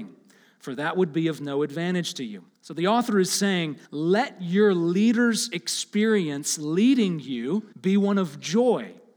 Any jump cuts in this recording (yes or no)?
yes